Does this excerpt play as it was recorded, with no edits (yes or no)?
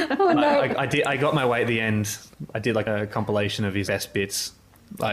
no